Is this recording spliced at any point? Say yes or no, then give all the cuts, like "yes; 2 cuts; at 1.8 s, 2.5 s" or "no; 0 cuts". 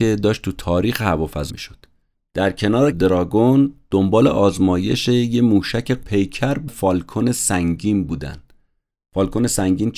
yes; 4 cuts; at 1.5 s, 2.9 s, 6.0 s, 6.7 s